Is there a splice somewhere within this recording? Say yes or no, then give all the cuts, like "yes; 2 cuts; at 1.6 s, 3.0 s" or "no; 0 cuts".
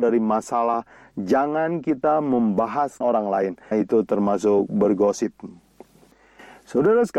yes; 2 cuts; at 3.0 s, 3.7 s